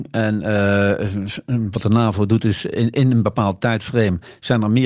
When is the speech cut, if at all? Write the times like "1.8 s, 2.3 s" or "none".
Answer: none